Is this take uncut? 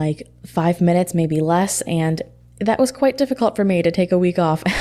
yes; 0 cuts

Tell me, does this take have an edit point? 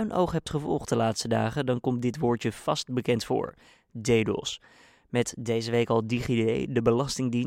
no; 0 cuts

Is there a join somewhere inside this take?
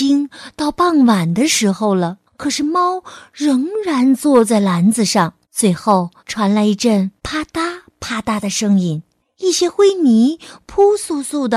yes; 5 cuts; at 2.3 s, 5.4 s, 6.2 s, 7.2 s, 9.2 s

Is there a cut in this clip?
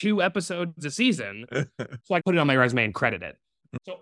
yes; 1 cut; at 2.2 s

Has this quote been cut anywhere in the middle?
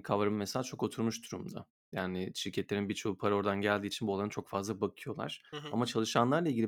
yes; 1 cut; at 5.5 s

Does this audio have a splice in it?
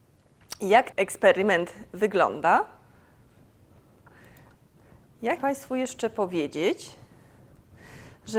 yes; 2 cuts; at 0.9 s, 5.4 s

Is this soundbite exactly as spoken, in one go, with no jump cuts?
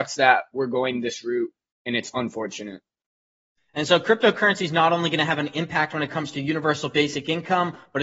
yes; 0 cuts

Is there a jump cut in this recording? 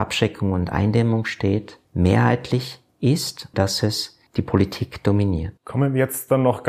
yes; 4 cuts; at 1.8 s, 3.5 s, 4.3 s, 5.6 s

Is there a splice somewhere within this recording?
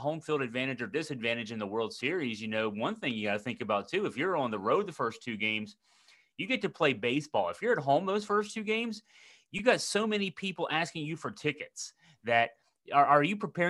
no; 0 cuts

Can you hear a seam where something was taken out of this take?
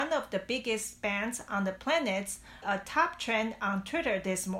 yes; 1 cut; at 2.6 s

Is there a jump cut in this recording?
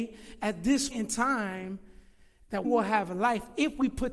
yes; 2 cuts; at 0.9 s, 2.6 s

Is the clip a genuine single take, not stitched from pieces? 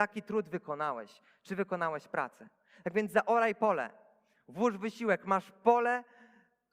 yes; 0 cuts

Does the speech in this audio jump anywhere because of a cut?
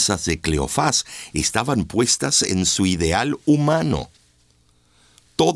no; 0 cuts

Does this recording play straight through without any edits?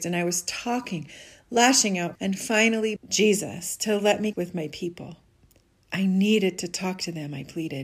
no; 3 cuts; at 2.2 s, 3.0 s, 4.3 s

